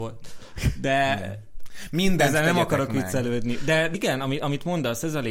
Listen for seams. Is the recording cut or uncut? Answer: cut